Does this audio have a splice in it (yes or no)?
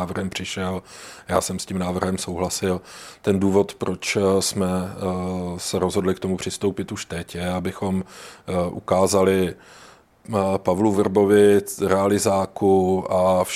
no